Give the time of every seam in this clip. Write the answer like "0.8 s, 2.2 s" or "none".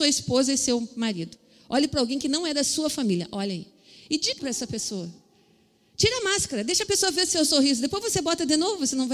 4.4 s